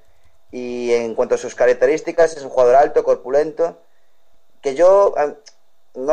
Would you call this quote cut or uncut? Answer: uncut